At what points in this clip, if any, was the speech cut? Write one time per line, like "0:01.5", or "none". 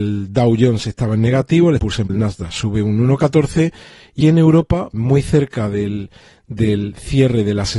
0:01.8
0:02.1
0:04.2
0:04.9

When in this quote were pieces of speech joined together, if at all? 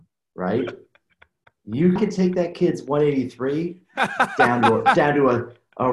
0:02.0

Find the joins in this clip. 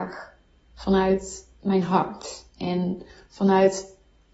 0:03.1

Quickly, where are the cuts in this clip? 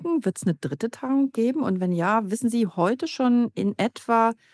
none

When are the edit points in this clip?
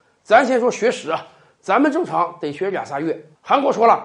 none

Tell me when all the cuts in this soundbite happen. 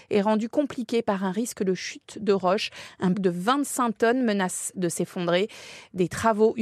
0:03.1

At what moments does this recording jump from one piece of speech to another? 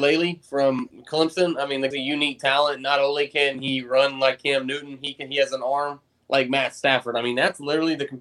0:01.9

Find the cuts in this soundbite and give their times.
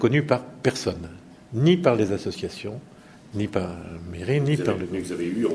none

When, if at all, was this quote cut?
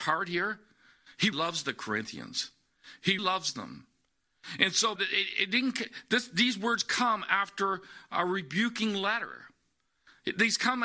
0:01.3
0:03.2
0:05.0

